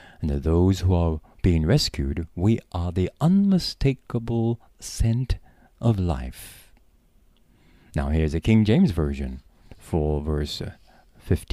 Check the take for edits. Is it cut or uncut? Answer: uncut